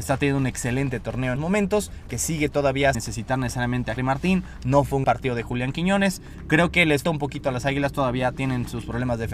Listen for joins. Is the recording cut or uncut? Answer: cut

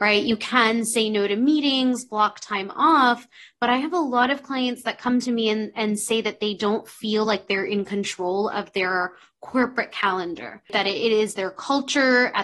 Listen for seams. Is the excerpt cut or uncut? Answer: uncut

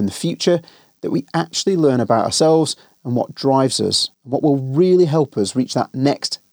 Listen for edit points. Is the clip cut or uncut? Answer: cut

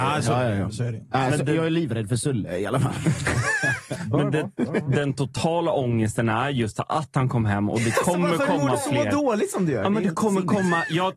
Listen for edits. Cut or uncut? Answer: uncut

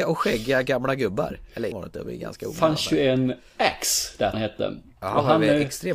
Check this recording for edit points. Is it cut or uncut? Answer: cut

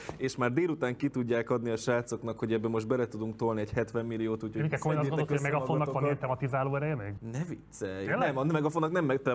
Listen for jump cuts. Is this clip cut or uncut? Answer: uncut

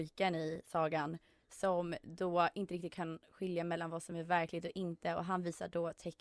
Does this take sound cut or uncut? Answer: uncut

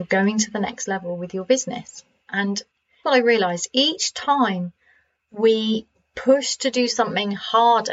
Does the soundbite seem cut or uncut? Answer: cut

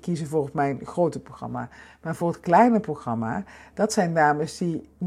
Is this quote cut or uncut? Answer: uncut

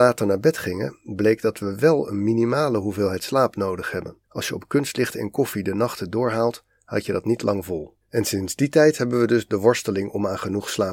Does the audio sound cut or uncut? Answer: cut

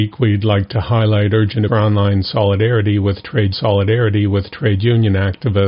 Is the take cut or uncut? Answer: cut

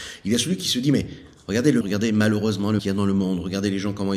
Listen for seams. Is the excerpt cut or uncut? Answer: cut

